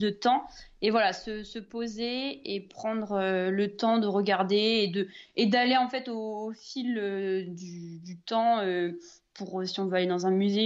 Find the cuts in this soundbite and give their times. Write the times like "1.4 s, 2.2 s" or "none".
none